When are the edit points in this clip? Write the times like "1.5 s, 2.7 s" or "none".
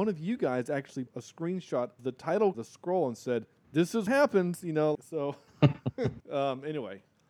1.1 s, 2.0 s, 2.5 s, 3.6 s, 4.1 s, 4.9 s, 6.2 s